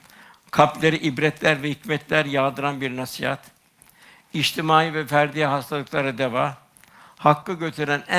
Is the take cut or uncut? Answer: uncut